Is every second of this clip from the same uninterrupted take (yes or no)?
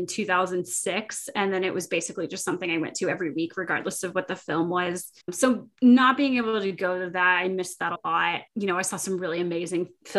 no